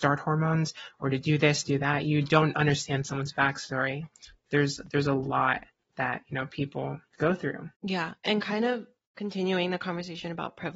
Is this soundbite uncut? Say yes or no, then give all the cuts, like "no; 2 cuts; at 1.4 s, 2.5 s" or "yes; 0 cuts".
no; 3 cuts; at 5.8 s, 7.1 s, 7.7 s